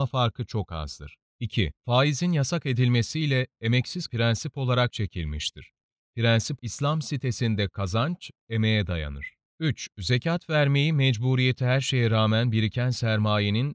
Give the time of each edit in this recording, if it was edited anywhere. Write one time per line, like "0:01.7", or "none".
0:01.8
0:04.1
0:04.9
0:06.6